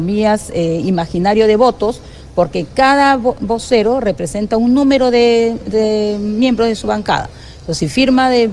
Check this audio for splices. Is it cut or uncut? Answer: uncut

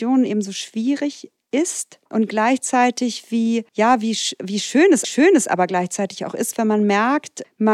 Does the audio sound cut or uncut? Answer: cut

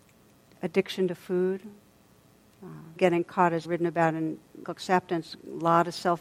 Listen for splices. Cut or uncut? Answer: cut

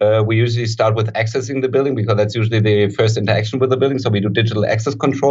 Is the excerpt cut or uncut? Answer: uncut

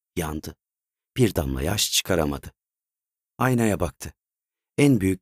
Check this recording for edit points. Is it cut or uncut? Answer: uncut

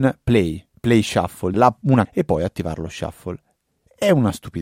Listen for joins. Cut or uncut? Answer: cut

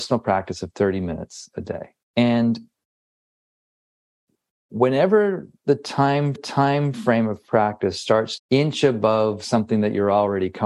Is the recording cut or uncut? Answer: cut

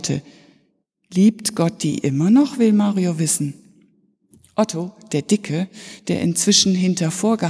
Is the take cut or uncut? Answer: uncut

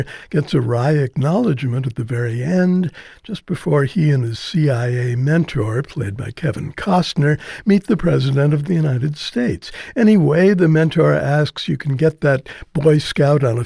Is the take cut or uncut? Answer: uncut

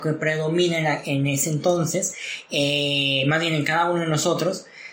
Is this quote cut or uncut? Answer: uncut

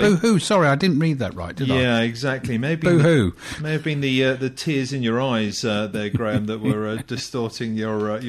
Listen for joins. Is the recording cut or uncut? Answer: uncut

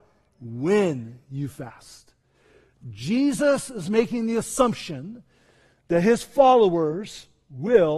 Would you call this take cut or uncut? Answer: uncut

